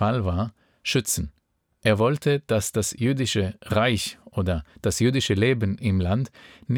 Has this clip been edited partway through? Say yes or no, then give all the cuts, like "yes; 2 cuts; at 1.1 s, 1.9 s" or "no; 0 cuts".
no; 0 cuts